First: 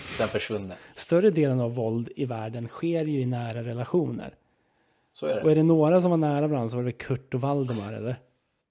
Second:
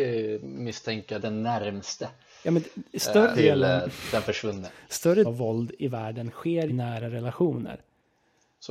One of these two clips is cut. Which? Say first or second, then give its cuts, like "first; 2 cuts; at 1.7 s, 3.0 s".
second; 4 cuts; at 1.2 s, 3.3 s, 5.2 s, 6.7 s